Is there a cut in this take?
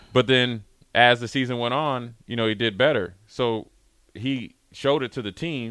no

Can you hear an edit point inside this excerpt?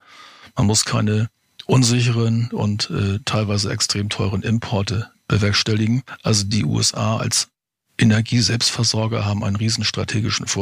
no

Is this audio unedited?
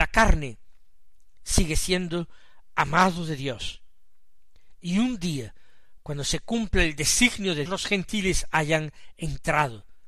no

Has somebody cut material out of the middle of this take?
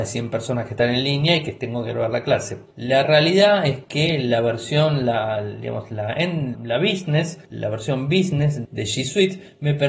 yes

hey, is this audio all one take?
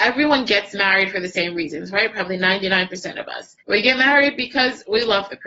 no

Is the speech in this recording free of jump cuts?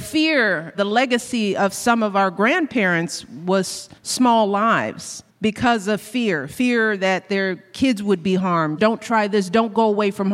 no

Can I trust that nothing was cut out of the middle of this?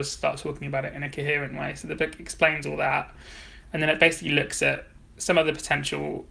yes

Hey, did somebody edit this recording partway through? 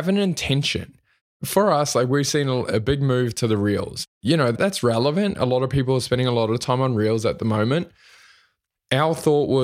no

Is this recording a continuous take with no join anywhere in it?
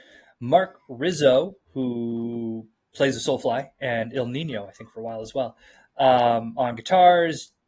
yes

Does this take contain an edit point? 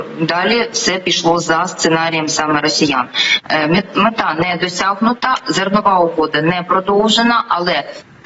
no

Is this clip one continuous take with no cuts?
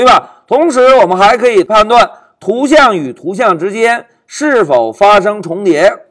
yes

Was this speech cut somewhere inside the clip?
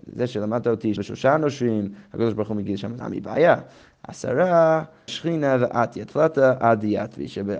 yes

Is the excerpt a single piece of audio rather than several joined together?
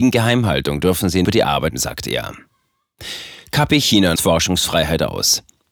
no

